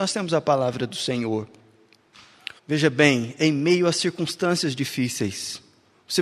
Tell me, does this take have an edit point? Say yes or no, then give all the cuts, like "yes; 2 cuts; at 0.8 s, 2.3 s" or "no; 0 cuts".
yes; 1 cut; at 2.6 s